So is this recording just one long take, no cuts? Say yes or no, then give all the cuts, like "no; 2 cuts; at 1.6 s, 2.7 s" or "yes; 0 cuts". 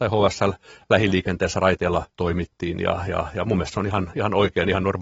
no; 1 cut; at 2.1 s